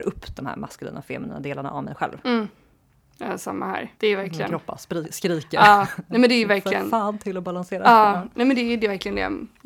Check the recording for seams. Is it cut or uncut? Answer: cut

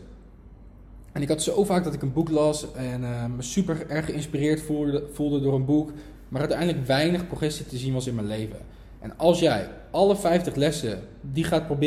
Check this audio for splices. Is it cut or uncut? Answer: uncut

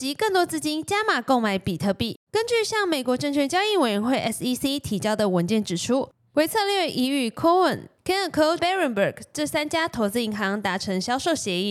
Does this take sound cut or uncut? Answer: cut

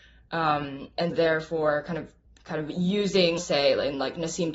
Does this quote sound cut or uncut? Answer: cut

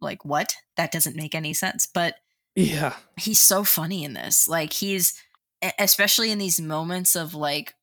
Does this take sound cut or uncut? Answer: uncut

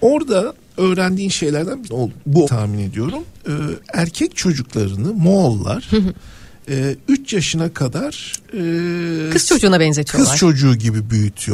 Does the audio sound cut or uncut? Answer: cut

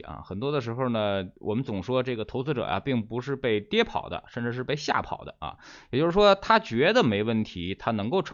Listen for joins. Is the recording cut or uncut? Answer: cut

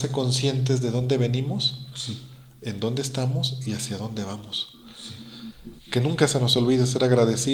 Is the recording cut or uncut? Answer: uncut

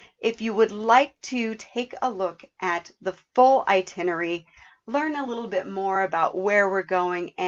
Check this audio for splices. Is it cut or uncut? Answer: uncut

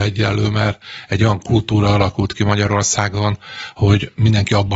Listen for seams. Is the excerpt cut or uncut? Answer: uncut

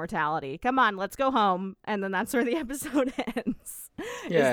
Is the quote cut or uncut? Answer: uncut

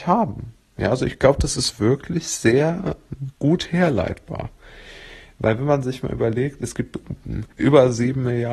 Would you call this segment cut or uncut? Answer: cut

